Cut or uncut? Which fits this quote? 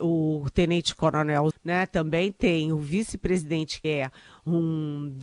cut